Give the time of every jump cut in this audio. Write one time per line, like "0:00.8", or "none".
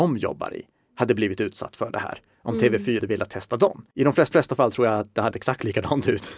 0:03.0
0:03.9
0:04.3
0:05.3